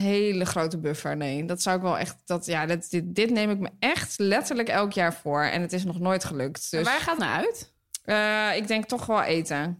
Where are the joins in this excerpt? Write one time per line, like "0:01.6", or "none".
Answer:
0:07.2